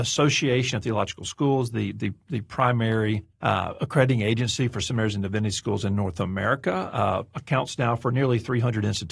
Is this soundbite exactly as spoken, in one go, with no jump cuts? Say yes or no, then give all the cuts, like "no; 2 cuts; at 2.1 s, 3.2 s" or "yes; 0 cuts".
no; 1 cut; at 3.3 s